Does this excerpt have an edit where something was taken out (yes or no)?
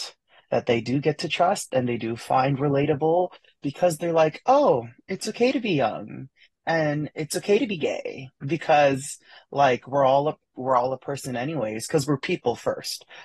no